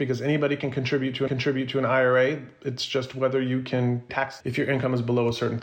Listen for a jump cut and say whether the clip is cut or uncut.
cut